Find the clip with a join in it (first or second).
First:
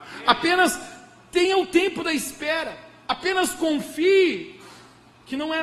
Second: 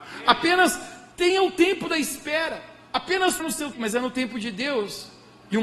second